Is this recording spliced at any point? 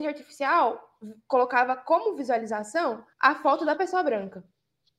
yes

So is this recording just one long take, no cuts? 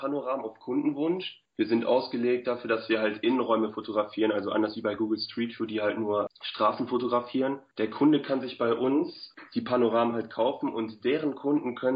yes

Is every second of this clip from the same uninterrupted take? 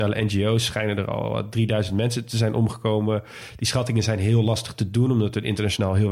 yes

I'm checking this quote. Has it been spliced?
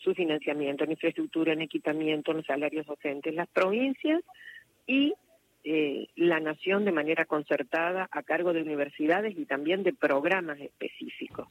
no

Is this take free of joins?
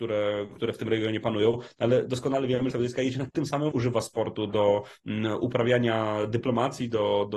no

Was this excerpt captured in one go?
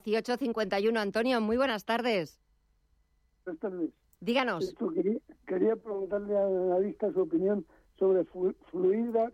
yes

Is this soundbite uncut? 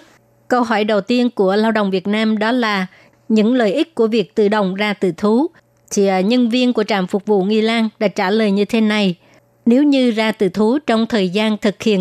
yes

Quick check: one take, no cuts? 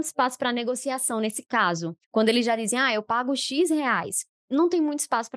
no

